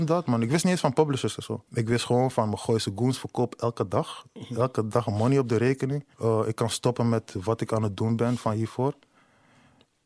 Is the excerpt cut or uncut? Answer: cut